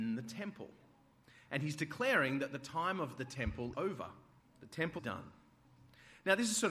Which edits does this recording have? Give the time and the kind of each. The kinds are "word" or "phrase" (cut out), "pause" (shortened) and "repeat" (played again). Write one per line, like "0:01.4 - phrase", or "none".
0:03.7 - word
0:04.4 - pause
0:05.0 - word